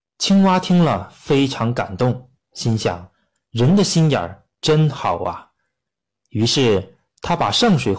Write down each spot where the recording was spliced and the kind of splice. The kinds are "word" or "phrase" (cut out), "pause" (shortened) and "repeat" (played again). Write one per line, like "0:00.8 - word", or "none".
none